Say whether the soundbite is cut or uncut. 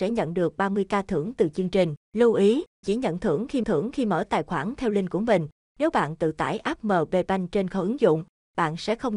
cut